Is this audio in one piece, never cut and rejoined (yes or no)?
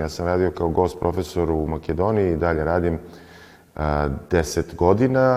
yes